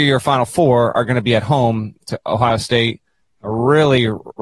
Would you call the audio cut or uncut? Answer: uncut